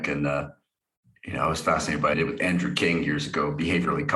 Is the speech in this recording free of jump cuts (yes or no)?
no